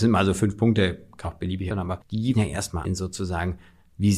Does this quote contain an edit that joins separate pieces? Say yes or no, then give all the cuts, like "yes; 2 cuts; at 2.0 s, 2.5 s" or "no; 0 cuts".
yes; 4 cuts; at 1.2 s, 1.7 s, 2.3 s, 2.8 s